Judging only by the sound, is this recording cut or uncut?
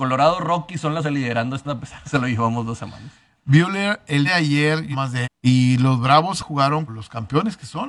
cut